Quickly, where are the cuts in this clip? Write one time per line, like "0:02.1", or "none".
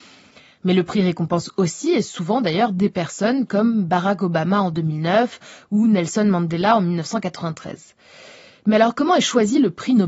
none